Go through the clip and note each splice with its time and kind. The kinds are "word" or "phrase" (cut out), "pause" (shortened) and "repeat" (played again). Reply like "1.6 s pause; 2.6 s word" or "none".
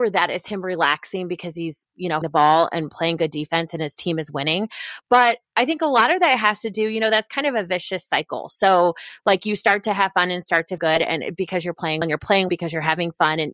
2.2 s word; 10.8 s word; 12.0 s word; 12.5 s word